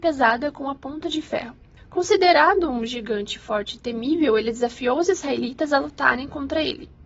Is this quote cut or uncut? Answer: uncut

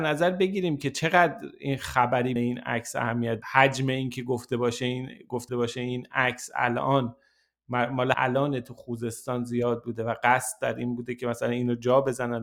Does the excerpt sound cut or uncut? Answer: cut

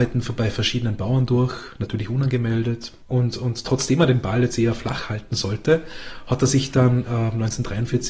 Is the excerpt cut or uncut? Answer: uncut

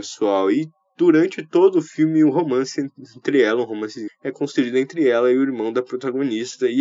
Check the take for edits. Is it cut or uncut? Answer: cut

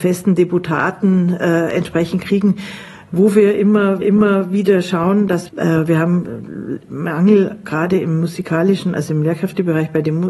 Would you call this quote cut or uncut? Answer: cut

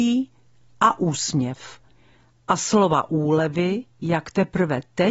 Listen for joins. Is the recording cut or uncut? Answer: uncut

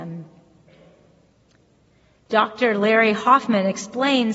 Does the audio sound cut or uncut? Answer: uncut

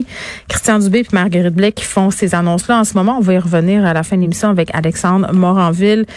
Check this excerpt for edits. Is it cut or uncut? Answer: uncut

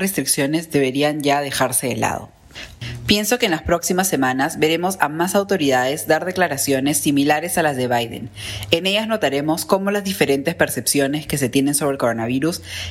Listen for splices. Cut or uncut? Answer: uncut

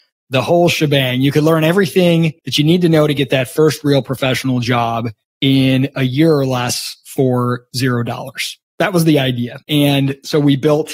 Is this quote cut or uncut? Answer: cut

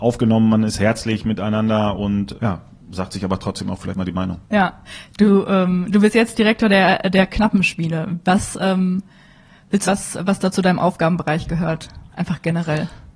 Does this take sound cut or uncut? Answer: cut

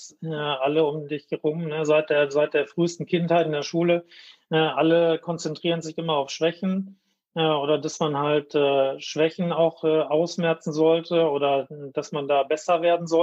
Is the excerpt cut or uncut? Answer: uncut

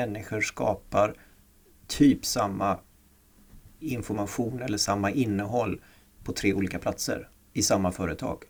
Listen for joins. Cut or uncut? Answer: uncut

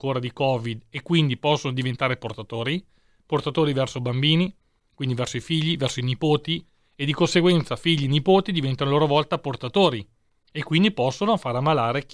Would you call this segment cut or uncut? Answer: uncut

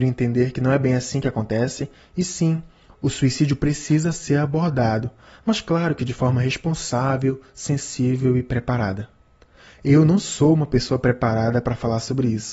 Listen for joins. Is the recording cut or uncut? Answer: uncut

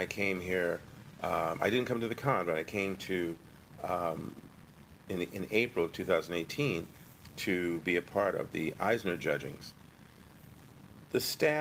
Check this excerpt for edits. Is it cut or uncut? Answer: uncut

